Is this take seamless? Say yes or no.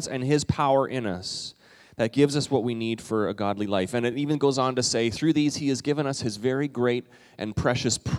yes